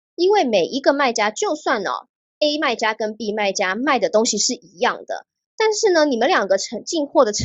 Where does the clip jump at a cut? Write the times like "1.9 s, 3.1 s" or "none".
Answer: none